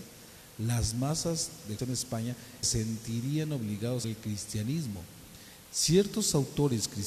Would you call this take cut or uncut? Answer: cut